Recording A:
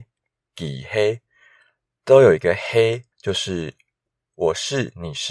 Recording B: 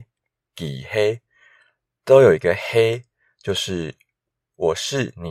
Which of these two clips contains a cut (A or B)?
A